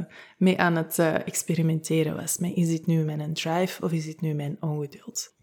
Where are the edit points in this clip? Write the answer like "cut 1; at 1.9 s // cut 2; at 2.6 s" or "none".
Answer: none

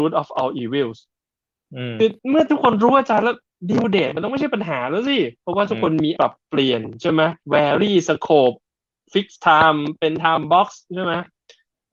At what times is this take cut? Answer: cut 1; at 2.2 s // cut 2; at 5.4 s // cut 3; at 6.2 s // cut 4; at 7.4 s

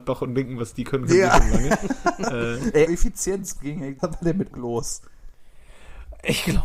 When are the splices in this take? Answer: cut 1; at 2.9 s // cut 2; at 3.6 s // cut 3; at 4.0 s // cut 4; at 4.5 s

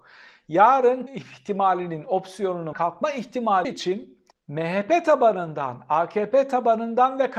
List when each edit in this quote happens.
cut 1; at 1.1 s // cut 2; at 2.7 s // cut 3; at 3.6 s // cut 4; at 4.3 s

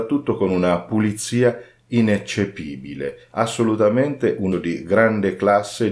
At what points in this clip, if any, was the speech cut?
cut 1; at 4.5 s

